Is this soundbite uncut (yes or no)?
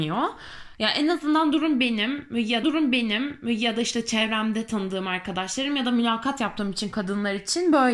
no